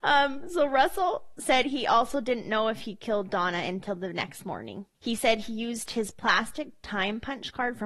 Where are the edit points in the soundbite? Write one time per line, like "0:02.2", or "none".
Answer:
0:04.9